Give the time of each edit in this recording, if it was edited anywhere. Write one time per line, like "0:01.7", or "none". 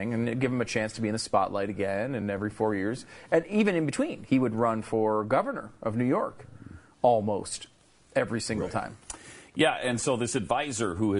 none